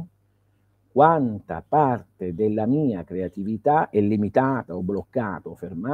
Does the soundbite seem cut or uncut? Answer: uncut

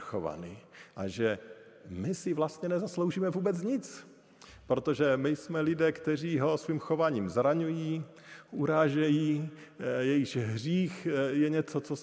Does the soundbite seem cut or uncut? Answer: uncut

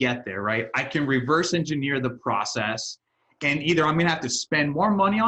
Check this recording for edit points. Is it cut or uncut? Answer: uncut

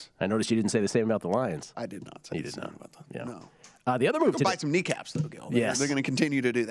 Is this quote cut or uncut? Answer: uncut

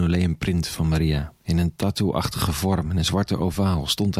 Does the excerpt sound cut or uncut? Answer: uncut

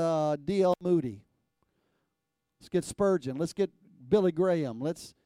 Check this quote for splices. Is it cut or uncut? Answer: uncut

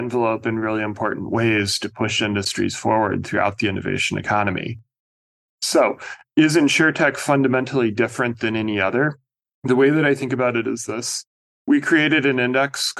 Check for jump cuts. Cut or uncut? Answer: uncut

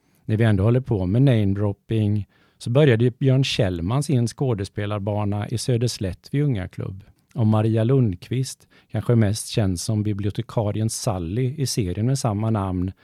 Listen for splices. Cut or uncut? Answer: cut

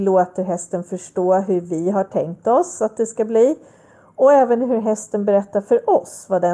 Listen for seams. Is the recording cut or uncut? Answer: uncut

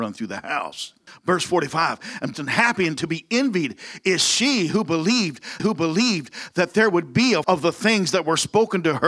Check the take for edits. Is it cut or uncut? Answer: cut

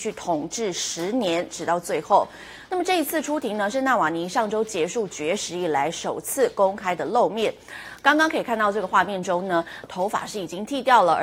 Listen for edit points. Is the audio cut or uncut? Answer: cut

